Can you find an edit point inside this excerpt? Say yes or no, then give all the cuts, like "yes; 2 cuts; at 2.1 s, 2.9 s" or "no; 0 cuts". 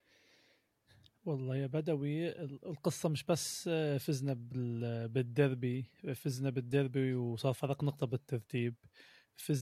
no; 0 cuts